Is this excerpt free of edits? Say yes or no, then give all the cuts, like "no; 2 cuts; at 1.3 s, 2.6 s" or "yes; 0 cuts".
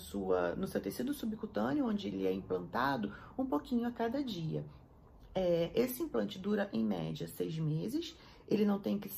yes; 0 cuts